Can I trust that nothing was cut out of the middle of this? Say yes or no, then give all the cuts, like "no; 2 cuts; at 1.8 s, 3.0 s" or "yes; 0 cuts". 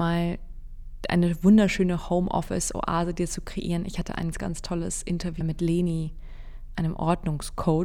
no; 3 cuts; at 4.3 s, 5.4 s, 6.7 s